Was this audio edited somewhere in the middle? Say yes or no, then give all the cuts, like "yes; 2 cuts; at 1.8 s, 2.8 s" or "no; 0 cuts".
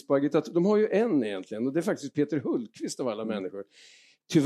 no; 0 cuts